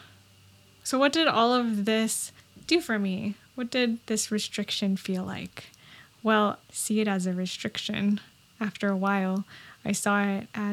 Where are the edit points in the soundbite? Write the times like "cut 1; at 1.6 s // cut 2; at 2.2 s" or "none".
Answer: cut 1; at 2.4 s // cut 2; at 6.6 s

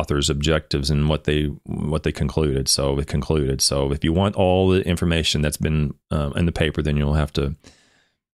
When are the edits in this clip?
cut 1; at 3.1 s

